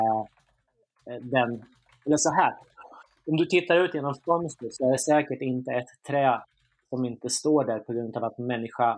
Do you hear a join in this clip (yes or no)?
no